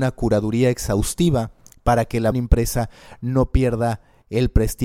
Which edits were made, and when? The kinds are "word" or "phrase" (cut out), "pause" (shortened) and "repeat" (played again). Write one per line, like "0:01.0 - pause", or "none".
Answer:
0:02.3 - word